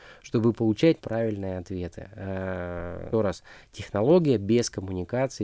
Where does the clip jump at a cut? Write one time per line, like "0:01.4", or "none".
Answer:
0:01.0
0:03.1

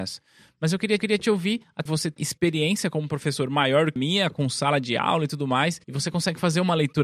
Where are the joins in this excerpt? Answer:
0:01.0
0:01.9
0:02.2
0:04.0
0:05.8

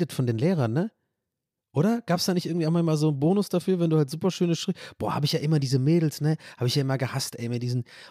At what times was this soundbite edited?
none

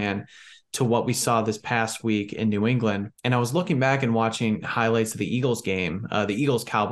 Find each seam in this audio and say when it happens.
0:03.1

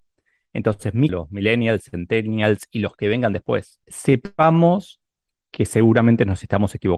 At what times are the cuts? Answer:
0:01.1
0:03.8

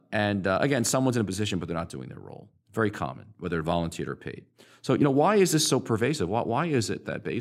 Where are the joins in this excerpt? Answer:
none

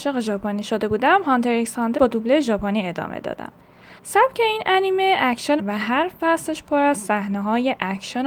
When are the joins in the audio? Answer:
0:02.0
0:04.0
0:05.6

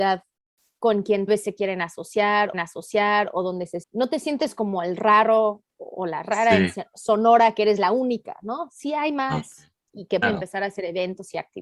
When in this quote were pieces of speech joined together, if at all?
0:01.3
0:02.5
0:03.8
0:05.7
0:10.2

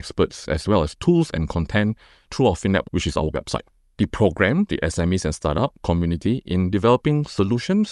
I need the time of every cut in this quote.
0:02.8
0:03.3
0:04.7

